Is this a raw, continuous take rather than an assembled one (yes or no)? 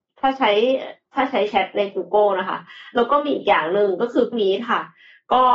no